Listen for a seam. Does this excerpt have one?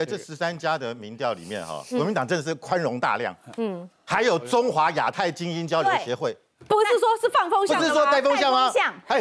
no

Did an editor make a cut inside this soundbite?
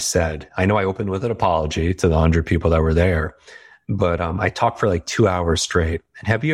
no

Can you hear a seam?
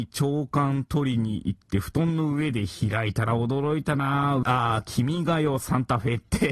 yes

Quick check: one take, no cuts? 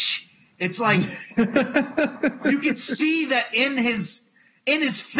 yes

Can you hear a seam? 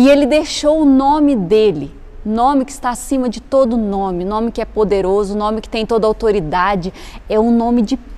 no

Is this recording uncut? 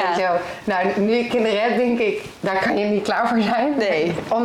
yes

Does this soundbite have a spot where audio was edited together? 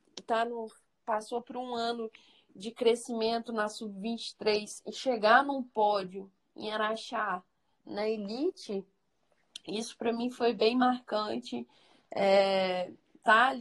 no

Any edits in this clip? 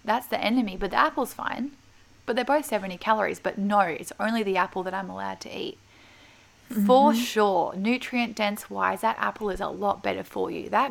no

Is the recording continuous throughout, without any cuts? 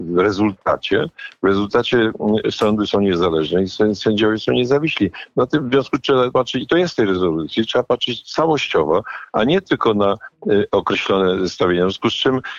no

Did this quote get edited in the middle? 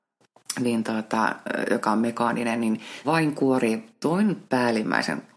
yes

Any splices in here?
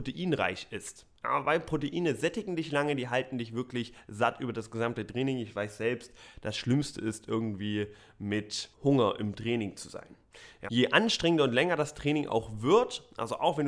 yes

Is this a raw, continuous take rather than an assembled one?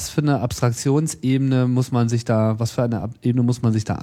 yes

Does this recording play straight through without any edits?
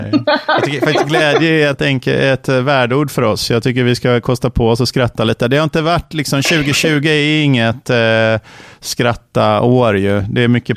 no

